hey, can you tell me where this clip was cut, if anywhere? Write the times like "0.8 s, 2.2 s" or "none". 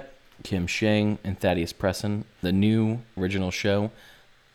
2.4 s, 3.2 s